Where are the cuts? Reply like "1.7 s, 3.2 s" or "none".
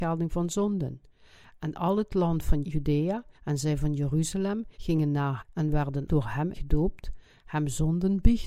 2.6 s, 3.3 s, 4.7 s, 5.4 s, 6.1 s, 6.5 s